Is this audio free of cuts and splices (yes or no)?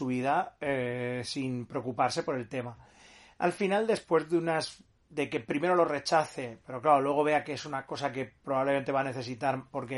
yes